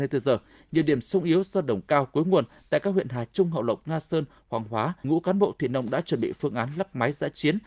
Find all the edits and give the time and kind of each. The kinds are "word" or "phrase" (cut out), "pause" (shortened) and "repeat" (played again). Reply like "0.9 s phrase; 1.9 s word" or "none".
5.0 s word